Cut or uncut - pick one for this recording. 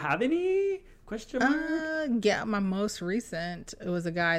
uncut